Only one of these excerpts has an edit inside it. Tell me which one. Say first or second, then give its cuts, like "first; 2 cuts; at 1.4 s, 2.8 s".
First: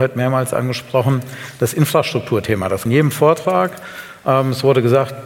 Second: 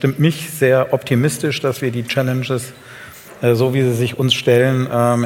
first; 1 cut; at 2.9 s